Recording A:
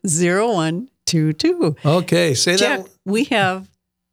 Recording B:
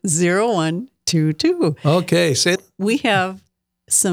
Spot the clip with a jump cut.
B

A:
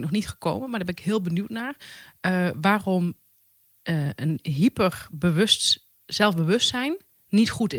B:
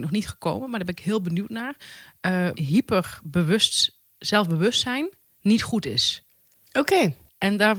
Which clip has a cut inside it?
B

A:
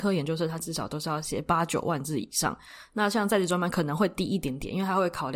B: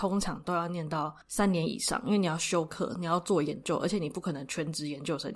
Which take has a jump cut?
B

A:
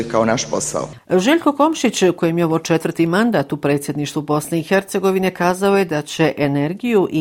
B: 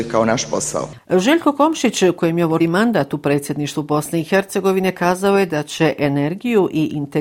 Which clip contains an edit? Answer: B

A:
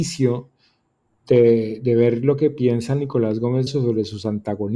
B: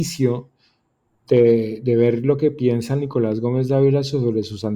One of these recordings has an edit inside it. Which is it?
A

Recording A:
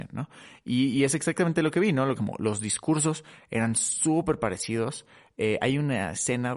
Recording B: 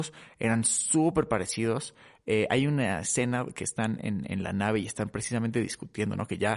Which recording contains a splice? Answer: A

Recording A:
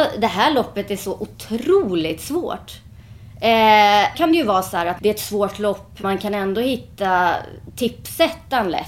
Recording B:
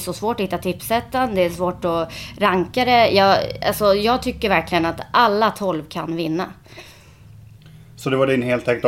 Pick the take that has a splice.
A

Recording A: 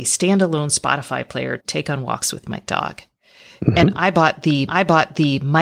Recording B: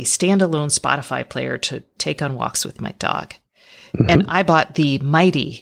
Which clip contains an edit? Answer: A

